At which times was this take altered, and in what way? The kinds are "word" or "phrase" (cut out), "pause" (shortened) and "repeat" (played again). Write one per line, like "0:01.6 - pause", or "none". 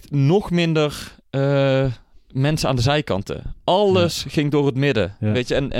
none